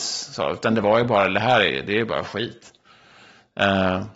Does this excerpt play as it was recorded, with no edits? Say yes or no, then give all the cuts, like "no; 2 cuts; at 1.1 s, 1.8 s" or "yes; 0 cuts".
yes; 0 cuts